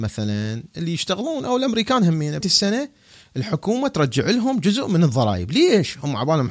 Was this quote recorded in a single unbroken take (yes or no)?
no